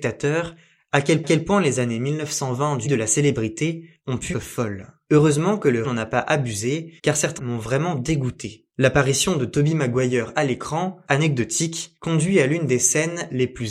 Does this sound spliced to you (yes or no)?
yes